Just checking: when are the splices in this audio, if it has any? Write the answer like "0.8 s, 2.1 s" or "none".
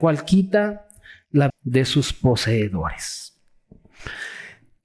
1.5 s